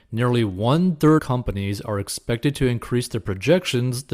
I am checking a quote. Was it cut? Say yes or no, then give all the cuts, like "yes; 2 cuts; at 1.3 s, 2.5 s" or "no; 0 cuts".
yes; 1 cut; at 1.2 s